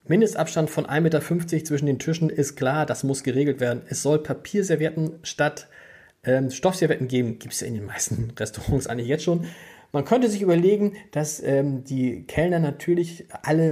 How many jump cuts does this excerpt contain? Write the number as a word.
zero